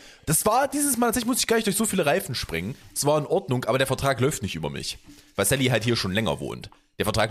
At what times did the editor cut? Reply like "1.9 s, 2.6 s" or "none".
none